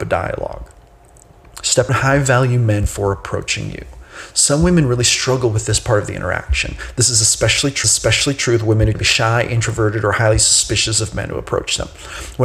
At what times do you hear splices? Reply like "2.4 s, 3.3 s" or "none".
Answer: 1.9 s, 7.8 s, 8.9 s

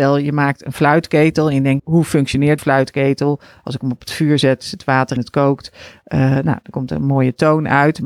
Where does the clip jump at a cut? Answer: 1.8 s, 2.6 s, 5.2 s

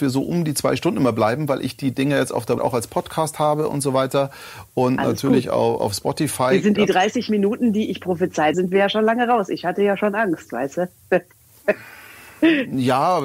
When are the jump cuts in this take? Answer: 2.6 s, 6.8 s, 8.5 s

